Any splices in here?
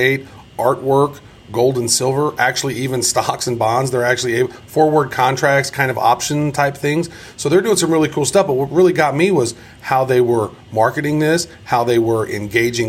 no; 0 cuts

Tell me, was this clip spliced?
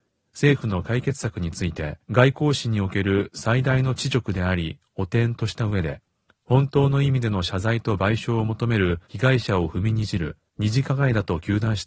yes; 4 cuts; at 2.0 s, 6.3 s, 9.0 s, 10.5 s

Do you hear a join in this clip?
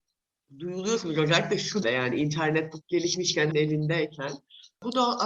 yes; 3 cuts; at 1.8 s, 2.8 s, 3.5 s

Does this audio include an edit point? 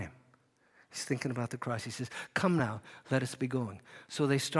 no; 0 cuts

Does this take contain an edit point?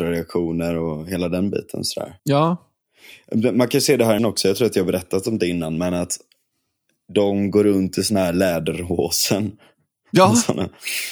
yes; 2 cuts; at 2.2 s, 4.2 s

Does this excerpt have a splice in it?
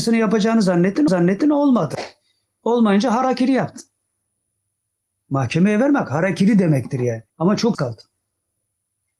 yes; 3 cuts; at 1.1 s, 7.3 s, 7.7 s

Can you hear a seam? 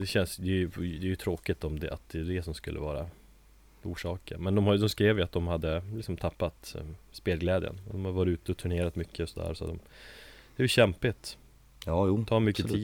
no; 0 cuts

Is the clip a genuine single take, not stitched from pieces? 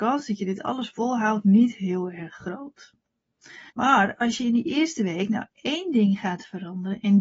no; 1 cut; at 3.7 s

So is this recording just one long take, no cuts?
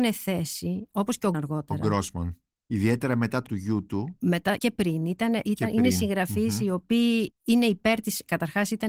no; 3 cuts; at 1.3 s, 3.5 s, 4.6 s

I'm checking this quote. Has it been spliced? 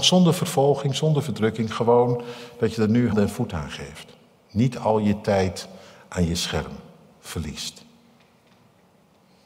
yes; 1 cut; at 3.1 s

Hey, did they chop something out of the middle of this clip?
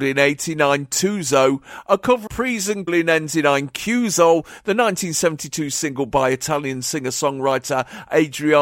yes; 2 cuts; at 2.3 s, 2.9 s

